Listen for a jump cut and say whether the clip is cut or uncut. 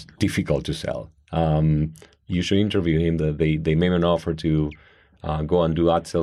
uncut